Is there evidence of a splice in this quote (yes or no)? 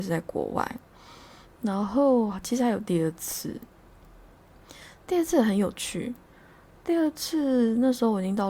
no